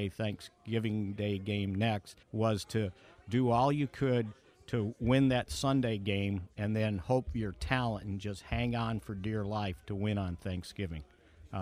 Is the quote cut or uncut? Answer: cut